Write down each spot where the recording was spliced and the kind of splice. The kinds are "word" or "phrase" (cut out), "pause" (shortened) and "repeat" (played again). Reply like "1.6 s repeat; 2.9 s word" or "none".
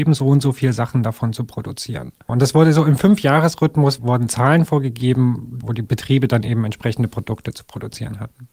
none